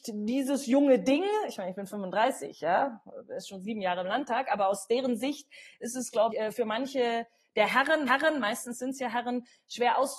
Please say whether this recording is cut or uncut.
cut